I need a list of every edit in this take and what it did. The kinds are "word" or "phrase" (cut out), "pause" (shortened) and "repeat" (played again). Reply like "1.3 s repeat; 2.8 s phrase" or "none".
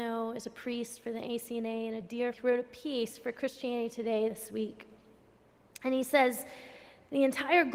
2.3 s word